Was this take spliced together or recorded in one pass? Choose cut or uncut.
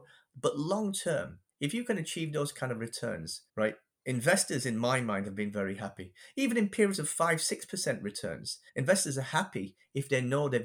cut